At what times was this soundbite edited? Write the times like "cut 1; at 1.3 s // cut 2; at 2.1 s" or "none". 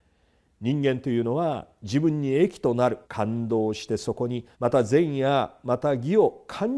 cut 1; at 3.0 s // cut 2; at 4.5 s

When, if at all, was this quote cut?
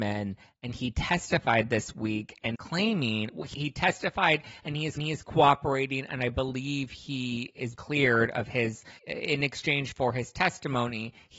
cut 1; at 2.5 s // cut 2; at 3.5 s // cut 3; at 5.0 s // cut 4; at 7.7 s // cut 5; at 9.0 s

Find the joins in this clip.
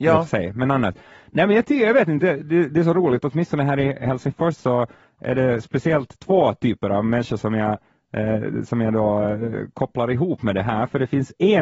none

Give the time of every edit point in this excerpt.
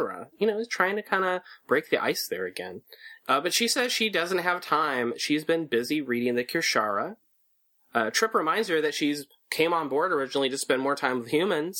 none

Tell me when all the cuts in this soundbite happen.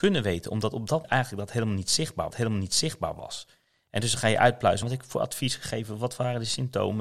cut 1; at 1.0 s // cut 2; at 2.3 s // cut 3; at 4.8 s

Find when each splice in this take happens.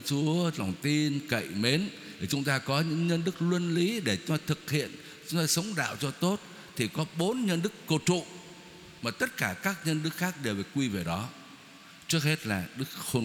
none

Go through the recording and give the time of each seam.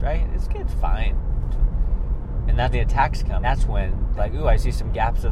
cut 1; at 2.7 s // cut 2; at 3.4 s // cut 3; at 4.2 s

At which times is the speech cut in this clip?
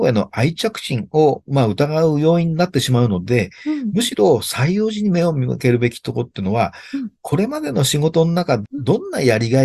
cut 1; at 8.6 s

